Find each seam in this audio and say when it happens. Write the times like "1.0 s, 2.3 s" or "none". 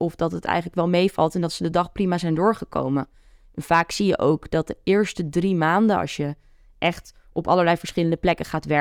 none